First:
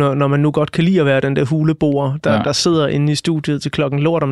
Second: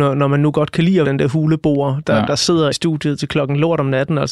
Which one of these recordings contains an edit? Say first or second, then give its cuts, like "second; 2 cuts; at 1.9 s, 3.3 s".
second; 2 cuts; at 1.0 s, 2.7 s